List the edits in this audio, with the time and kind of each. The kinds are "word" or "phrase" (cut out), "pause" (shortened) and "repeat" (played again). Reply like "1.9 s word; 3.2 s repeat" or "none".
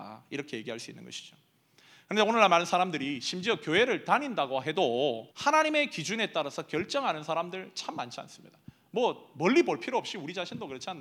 5.3 s pause